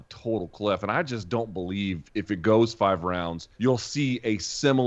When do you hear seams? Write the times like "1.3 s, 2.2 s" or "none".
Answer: 3.5 s